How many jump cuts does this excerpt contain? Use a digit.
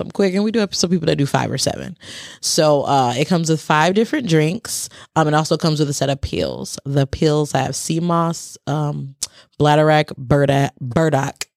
0